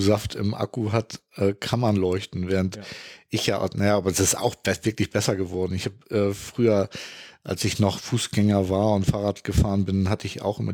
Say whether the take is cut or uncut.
uncut